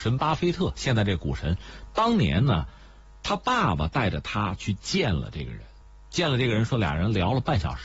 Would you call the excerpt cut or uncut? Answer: uncut